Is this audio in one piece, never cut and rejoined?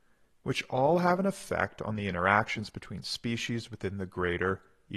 yes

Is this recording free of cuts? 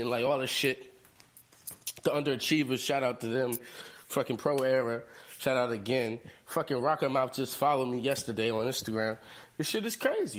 yes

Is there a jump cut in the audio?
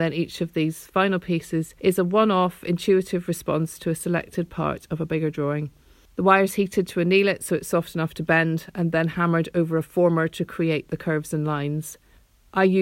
no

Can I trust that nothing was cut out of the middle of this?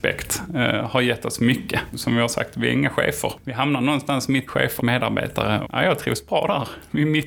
no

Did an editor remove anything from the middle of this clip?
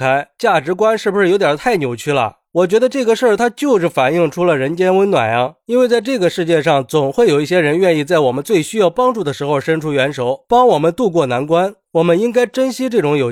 no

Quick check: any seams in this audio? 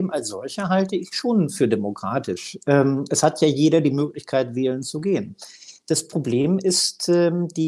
no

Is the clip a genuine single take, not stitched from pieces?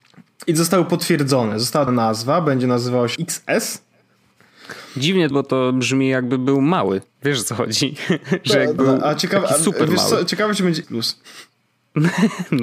no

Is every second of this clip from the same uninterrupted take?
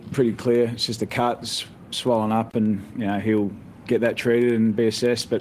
yes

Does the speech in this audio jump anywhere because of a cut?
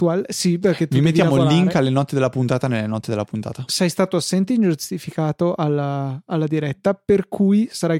no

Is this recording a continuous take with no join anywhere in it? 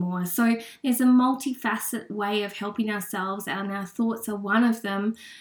yes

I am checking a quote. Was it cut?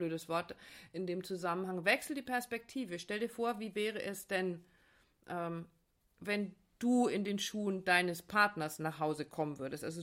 no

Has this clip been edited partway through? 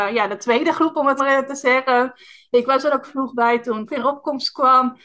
yes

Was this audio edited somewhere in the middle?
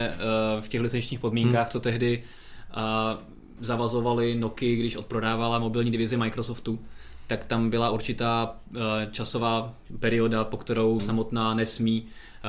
yes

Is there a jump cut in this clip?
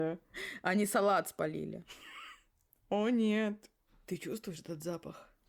no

